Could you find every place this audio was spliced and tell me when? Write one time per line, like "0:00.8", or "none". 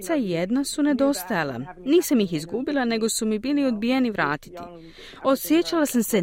none

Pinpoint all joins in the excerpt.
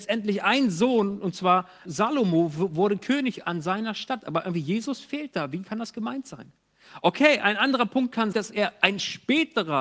0:01.8
0:08.3

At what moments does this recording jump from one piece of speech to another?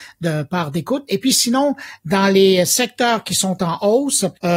none

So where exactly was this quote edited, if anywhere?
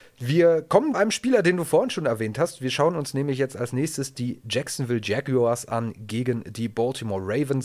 0:00.9

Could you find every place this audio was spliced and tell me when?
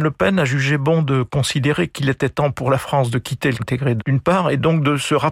0:03.6
0:04.0

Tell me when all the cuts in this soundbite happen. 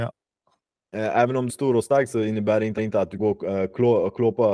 0:01.5
0:02.8
0:03.2

